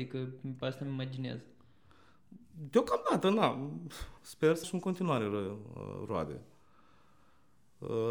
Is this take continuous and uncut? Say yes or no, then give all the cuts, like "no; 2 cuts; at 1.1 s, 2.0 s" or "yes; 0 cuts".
no; 2 cuts; at 4.2 s, 4.6 s